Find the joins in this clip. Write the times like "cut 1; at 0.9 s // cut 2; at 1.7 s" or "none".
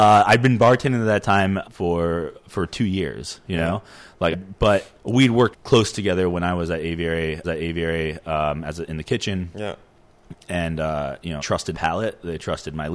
cut 1; at 1.6 s // cut 2; at 4.3 s // cut 3; at 5.0 s // cut 4; at 5.5 s // cut 5; at 7.4 s // cut 6; at 11.4 s // cut 7; at 11.7 s